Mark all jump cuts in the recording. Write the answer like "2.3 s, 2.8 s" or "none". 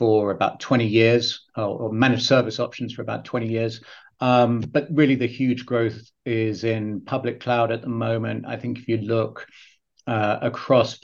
none